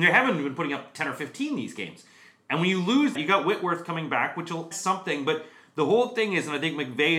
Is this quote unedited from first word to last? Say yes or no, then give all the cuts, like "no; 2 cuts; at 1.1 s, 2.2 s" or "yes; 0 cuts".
no; 2 cuts; at 3.1 s, 4.7 s